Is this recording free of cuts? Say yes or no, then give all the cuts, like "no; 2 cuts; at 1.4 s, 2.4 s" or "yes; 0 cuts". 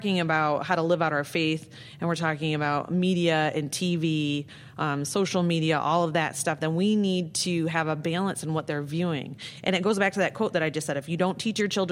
yes; 0 cuts